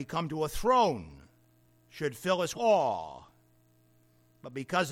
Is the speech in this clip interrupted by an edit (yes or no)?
yes